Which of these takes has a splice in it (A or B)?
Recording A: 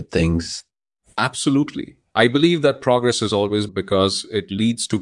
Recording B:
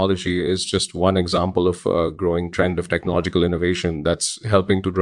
A